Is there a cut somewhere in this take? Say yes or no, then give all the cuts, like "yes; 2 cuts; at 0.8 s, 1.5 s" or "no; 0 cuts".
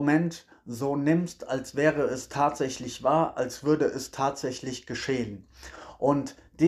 no; 0 cuts